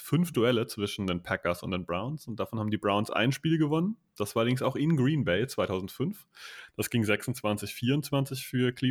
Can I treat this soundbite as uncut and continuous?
yes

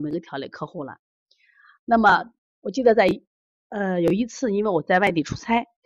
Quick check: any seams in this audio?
no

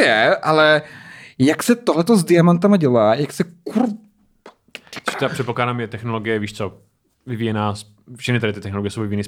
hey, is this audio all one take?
yes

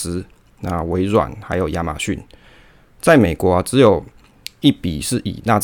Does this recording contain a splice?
no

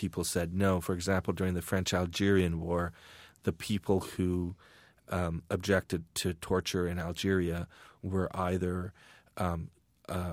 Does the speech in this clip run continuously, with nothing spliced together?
yes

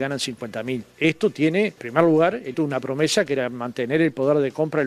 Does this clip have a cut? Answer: yes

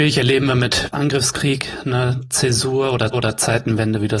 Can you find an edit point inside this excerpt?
yes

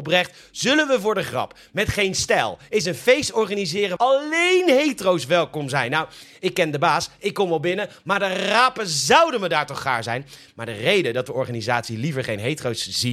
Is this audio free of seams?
no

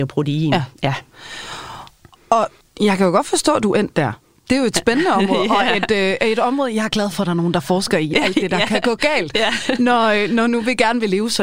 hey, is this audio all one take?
no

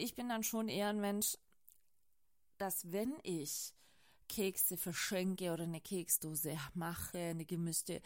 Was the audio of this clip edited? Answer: no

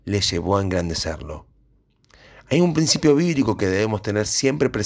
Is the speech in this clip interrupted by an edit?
no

